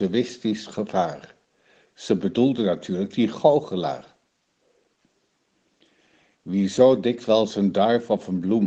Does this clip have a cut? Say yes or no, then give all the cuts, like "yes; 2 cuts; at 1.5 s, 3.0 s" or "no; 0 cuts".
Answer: no; 0 cuts